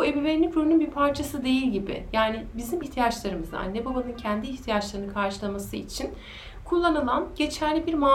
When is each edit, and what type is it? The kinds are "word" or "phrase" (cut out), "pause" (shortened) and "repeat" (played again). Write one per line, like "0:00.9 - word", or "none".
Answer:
0:02.8 - word